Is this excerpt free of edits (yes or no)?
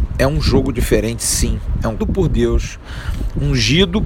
no